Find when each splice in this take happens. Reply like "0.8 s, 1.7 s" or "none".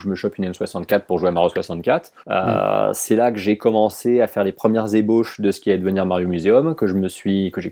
2.2 s